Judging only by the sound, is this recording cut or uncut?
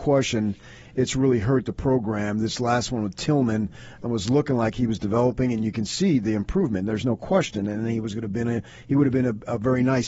uncut